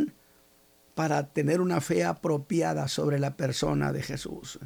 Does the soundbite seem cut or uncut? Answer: uncut